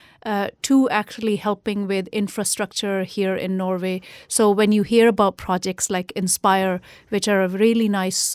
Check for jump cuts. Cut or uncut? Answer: uncut